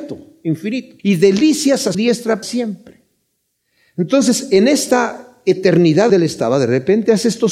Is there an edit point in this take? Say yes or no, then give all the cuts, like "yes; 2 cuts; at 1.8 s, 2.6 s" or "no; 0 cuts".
yes; 4 cuts; at 1.0 s, 1.9 s, 2.4 s, 6.1 s